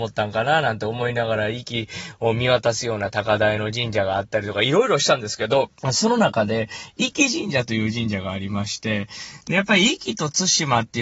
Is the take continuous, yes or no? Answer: no